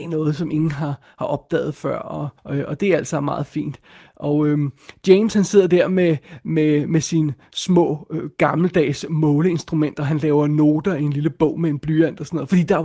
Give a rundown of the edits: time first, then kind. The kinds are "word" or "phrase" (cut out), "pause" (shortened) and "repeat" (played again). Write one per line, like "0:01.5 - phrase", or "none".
0:02.4 - pause